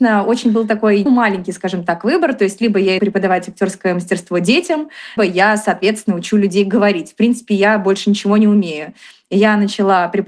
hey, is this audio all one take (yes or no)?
no